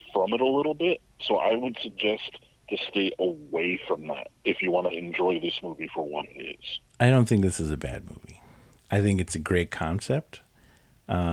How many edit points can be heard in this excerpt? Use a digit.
3